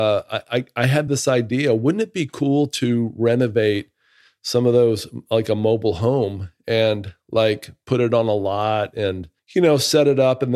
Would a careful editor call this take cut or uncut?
uncut